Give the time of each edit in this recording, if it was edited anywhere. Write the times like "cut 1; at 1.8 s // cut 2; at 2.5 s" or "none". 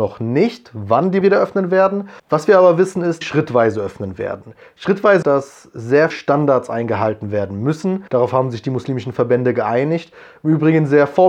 cut 1; at 1.2 s // cut 2; at 2.2 s // cut 3; at 3.2 s // cut 4; at 5.2 s // cut 5; at 6.1 s // cut 6; at 8.1 s